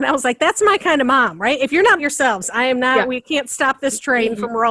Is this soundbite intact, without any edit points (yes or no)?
no